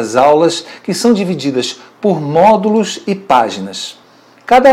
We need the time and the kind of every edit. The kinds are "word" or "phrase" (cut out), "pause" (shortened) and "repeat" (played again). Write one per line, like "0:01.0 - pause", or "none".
none